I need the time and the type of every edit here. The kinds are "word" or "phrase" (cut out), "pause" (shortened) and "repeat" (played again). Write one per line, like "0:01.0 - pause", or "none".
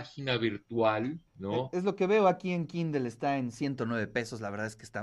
0:01.3 - pause